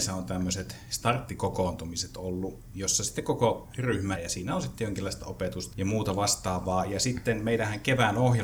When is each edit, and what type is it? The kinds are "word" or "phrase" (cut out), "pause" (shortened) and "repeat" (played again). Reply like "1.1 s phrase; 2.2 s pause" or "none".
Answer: 4.2 s word; 5.7 s word